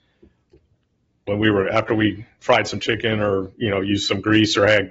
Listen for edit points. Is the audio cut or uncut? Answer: uncut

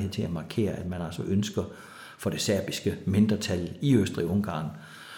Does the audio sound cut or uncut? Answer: uncut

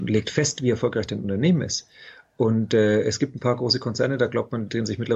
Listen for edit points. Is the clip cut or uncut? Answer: uncut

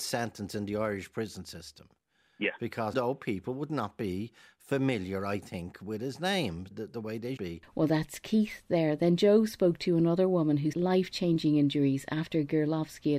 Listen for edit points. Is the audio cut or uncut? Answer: cut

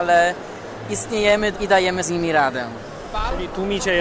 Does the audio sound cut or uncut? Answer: cut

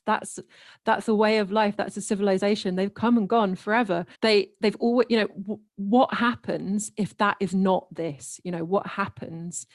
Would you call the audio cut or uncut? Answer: cut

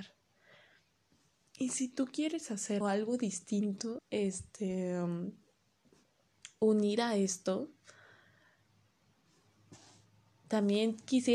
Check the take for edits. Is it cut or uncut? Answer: cut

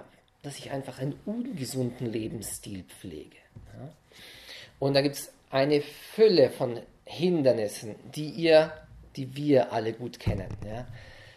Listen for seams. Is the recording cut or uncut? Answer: uncut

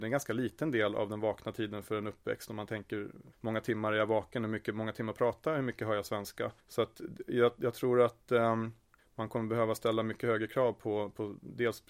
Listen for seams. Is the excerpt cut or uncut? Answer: cut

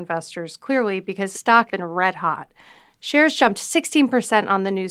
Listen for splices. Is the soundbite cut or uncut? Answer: cut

